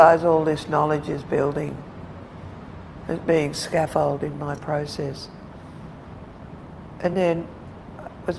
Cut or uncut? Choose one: uncut